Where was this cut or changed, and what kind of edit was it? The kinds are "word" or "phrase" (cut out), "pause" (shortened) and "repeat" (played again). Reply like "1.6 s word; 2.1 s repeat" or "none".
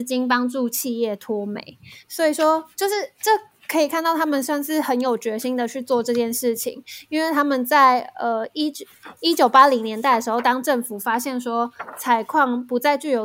none